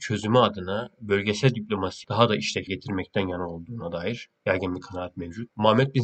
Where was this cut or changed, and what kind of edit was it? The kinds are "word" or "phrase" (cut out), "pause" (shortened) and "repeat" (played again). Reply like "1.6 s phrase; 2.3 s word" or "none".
2.7 s word